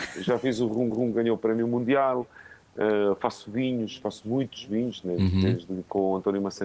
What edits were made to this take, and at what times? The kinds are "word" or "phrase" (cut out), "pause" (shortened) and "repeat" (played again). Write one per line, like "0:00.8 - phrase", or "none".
0:00.9 - repeat